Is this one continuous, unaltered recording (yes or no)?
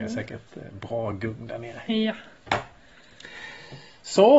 yes